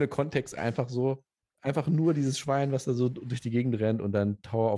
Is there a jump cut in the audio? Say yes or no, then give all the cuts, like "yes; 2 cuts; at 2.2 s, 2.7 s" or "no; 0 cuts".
yes; 1 cut; at 1.4 s